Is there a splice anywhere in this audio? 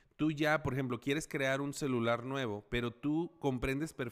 no; 0 cuts

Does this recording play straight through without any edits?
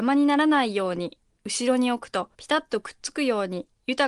no; 1 cut; at 2.3 s

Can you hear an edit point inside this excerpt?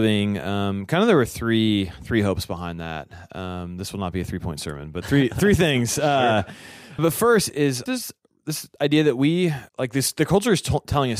yes; 4 cuts; at 7.0 s, 7.5 s, 7.9 s, 9.7 s

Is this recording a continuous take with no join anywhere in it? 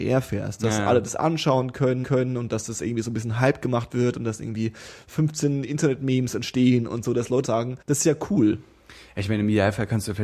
no; 3 cuts; at 2.0 s, 7.4 s, 7.8 s

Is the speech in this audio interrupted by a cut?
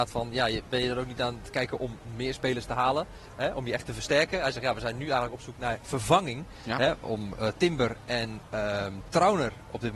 no; 0 cuts

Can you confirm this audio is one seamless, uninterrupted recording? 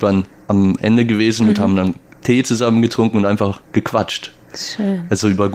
yes; 0 cuts

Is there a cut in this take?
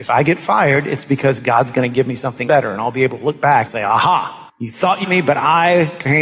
yes; 4 cuts; at 2.5 s, 3.7 s, 4.5 s, 5.0 s

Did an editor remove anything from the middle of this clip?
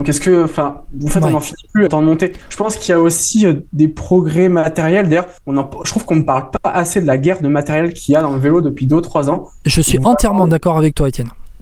yes; 3 cuts; at 1.9 s, 2.4 s, 5.4 s

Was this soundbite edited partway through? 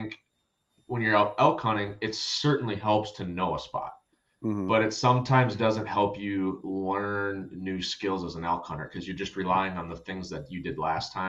yes; 1 cut; at 4.1 s

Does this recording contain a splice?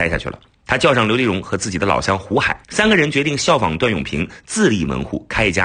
yes; 1 cut; at 2.6 s

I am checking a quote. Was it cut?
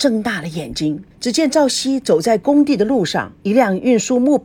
yes; 2 cuts; at 1.1 s, 3.4 s

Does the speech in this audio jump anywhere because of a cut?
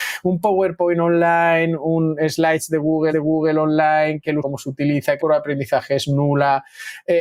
yes; 3 cuts; at 3.1 s, 4.4 s, 5.2 s

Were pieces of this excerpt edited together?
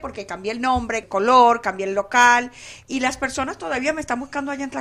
yes; 1 cut; at 1.0 s

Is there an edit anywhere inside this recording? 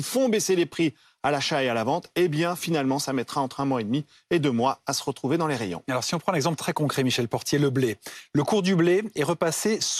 no; 0 cuts

